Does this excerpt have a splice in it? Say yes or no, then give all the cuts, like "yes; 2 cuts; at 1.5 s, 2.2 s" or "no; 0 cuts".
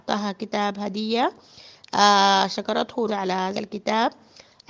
yes; 2 cuts; at 3.1 s, 3.5 s